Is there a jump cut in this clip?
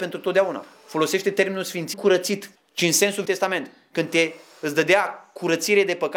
yes; 3 cuts; at 1.9 s, 2.5 s, 3.2 s

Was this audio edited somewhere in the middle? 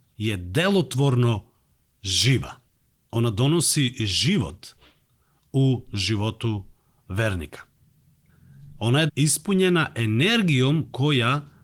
yes; 1 cut; at 9.1 s

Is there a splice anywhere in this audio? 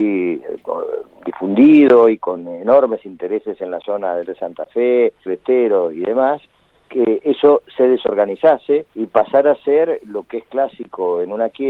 yes; 3 cuts; at 4.2 s, 5.3 s, 8.9 s

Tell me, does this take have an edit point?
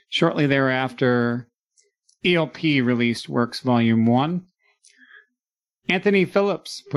no; 0 cuts

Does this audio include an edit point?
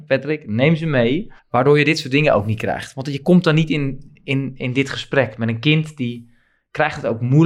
yes; 1 cut; at 1.4 s

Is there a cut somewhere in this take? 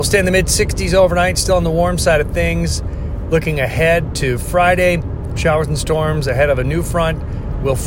no; 0 cuts

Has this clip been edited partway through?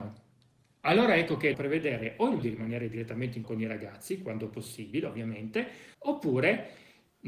yes; 4 cuts; at 1.5 s, 2.4 s, 3.4 s, 5.9 s

